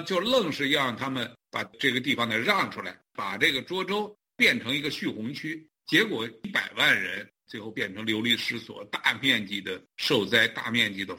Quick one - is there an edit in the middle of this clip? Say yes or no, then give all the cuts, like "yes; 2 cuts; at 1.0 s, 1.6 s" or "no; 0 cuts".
yes; 2 cuts; at 3.1 s, 9.9 s